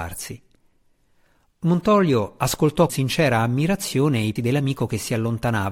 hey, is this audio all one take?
no; 2 cuts; at 2.9 s, 4.4 s

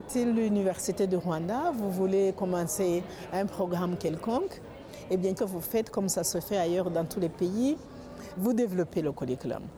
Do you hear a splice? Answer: yes; 2 cuts; at 5.4 s, 8.4 s

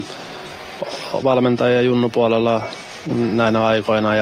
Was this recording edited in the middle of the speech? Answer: yes; 1 cut; at 1.2 s

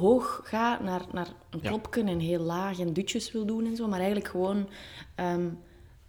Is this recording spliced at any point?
no; 0 cuts

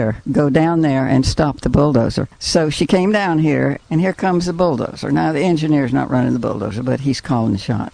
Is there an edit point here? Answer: no; 0 cuts

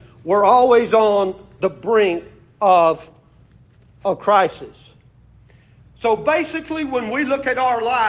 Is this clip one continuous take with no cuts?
yes; 0 cuts

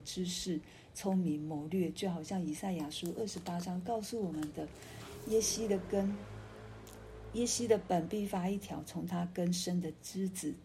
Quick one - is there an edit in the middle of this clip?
no; 0 cuts

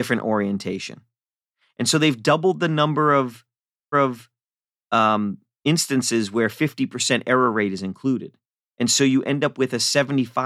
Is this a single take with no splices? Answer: no; 2 cuts; at 3.9 s, 8.4 s

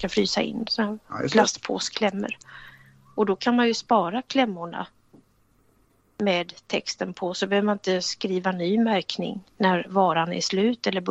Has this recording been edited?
no; 0 cuts

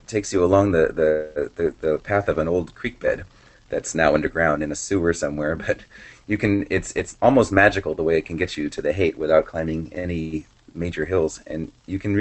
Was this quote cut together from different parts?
no; 0 cuts

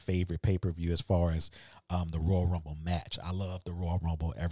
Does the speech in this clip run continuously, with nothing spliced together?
yes; 0 cuts

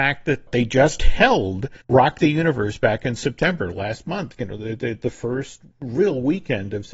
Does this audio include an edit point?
yes; 1 cut; at 1.8 s

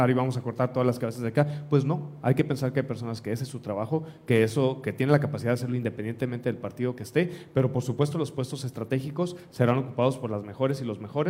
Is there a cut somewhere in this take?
no; 0 cuts

